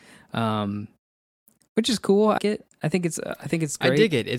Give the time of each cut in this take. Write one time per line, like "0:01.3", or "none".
0:02.4